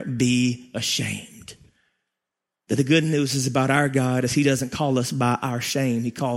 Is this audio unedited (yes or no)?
yes